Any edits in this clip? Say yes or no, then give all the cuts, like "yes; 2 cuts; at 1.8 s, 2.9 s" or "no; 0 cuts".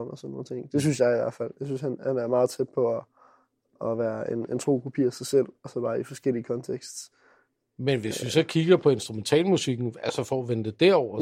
no; 0 cuts